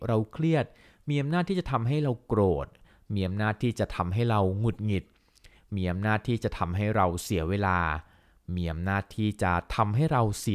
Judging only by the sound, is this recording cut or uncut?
uncut